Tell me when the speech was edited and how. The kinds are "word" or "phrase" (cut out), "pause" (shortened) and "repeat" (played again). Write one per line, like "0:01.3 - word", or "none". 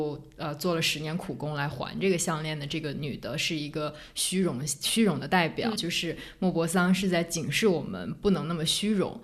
0:05.8 - word